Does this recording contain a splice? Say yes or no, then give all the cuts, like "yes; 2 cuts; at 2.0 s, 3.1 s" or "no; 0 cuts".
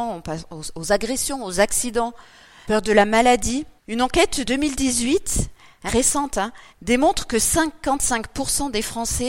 yes; 5 cuts; at 2.6 s, 3.8 s, 4.4 s, 5.9 s, 6.7 s